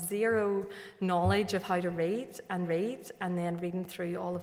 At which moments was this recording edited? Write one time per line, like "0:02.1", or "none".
0:02.6